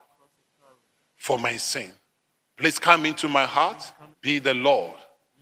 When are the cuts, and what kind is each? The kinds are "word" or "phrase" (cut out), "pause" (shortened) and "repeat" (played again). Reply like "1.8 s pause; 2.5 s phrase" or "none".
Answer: 2.1 s pause; 4.1 s pause